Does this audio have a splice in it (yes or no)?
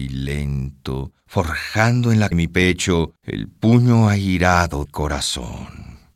yes